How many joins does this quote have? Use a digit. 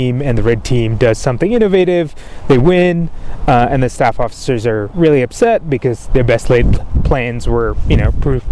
0